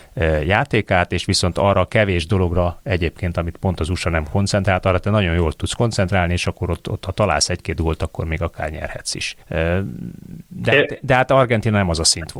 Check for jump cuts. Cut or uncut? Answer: cut